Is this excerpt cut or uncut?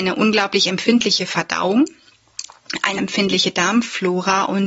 cut